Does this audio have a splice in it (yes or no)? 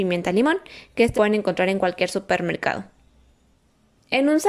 yes